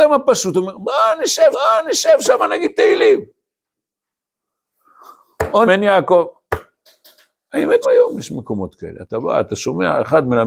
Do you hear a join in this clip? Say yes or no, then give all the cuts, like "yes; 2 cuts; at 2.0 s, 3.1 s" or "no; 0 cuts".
yes; 3 cuts; at 1.5 s, 5.7 s, 7.8 s